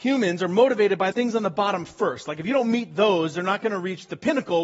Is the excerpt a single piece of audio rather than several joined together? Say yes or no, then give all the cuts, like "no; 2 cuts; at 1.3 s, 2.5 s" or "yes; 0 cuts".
no; 1 cut; at 1.1 s